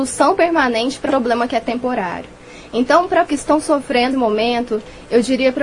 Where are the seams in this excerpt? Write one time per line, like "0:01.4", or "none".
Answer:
0:01.1
0:03.3
0:04.1

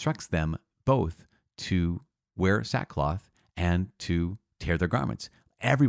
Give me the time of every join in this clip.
none

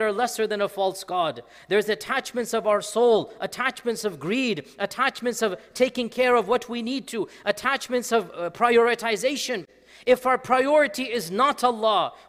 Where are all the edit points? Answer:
none

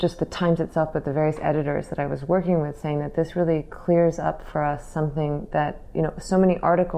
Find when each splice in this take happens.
none

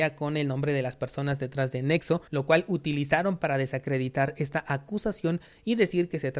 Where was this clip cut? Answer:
0:02.3

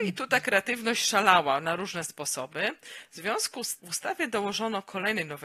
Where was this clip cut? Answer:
0:03.8

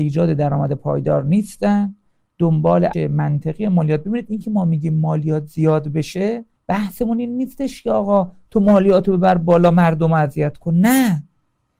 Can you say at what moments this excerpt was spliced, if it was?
0:02.9
0:06.6

